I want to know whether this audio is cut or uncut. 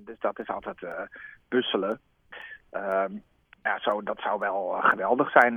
uncut